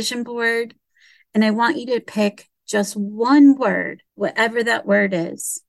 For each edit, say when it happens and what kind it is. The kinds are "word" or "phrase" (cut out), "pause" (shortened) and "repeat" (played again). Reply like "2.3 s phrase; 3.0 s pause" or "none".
4.1 s pause